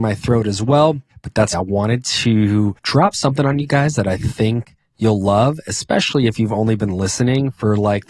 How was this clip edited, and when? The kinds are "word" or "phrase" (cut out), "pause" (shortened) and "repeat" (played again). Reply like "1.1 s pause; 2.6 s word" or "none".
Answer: 1.1 s pause; 1.5 s word; 2.8 s pause